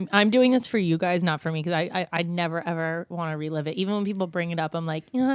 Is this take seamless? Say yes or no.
yes